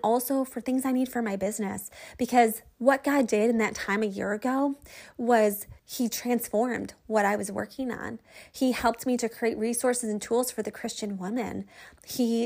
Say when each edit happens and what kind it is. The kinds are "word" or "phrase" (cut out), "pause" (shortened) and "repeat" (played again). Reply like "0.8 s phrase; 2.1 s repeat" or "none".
5.8 s pause